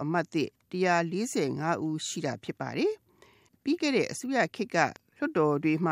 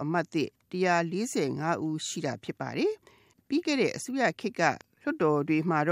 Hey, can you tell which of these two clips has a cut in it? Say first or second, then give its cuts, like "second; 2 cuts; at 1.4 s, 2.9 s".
second; 1 cut; at 3.0 s